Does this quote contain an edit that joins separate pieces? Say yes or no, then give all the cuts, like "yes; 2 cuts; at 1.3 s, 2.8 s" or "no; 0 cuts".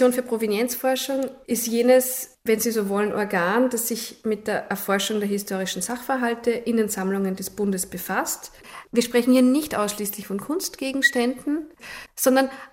no; 0 cuts